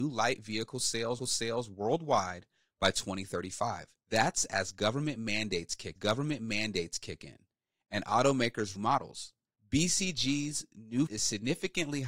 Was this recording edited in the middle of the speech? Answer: yes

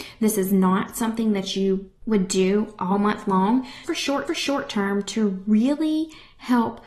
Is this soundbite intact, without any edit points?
no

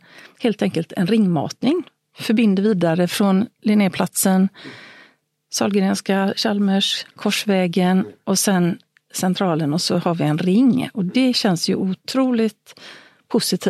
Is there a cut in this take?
no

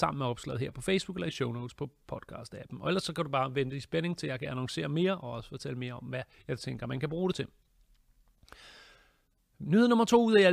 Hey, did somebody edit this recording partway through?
no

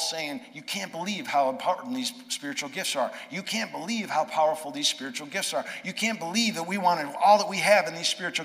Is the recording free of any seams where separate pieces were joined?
yes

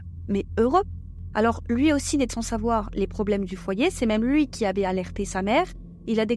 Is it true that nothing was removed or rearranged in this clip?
no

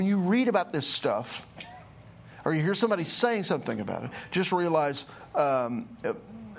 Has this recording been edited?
no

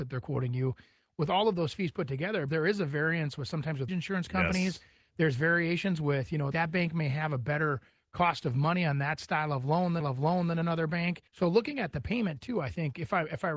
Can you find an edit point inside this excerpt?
yes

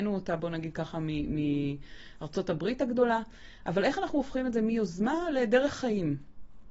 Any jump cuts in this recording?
no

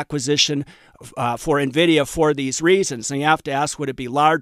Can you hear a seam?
no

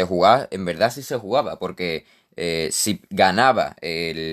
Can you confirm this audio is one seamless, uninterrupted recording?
yes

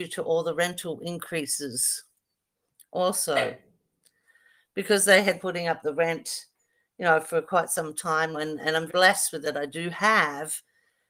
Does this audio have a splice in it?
yes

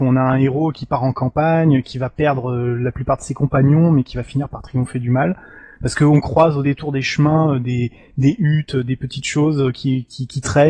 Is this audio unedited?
yes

